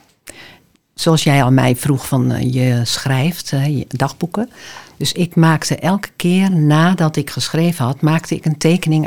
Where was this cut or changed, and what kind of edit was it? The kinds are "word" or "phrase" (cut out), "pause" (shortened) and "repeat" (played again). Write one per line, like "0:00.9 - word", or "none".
none